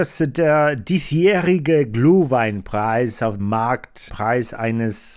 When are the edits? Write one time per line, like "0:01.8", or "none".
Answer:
0:03.4
0:04.1